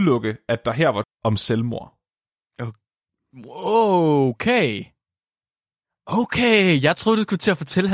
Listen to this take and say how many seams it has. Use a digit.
1